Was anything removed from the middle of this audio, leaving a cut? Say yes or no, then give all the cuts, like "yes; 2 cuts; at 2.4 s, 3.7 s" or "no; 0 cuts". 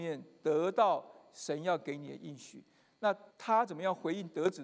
yes; 1 cut; at 3.3 s